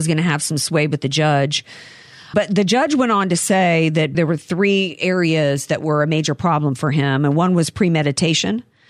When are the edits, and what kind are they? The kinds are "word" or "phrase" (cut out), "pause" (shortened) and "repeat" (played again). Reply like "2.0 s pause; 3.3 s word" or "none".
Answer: 2.3 s word; 4.1 s word